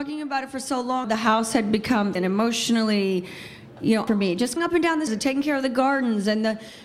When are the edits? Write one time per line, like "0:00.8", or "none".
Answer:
0:01.0
0:02.2
0:04.1
0:04.6
0:05.1